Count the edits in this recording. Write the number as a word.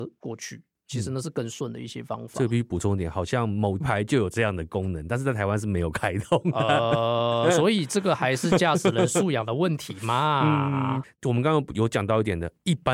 two